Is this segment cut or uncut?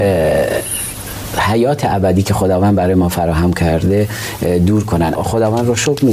cut